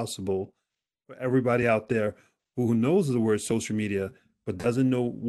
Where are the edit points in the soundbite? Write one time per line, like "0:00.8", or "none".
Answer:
none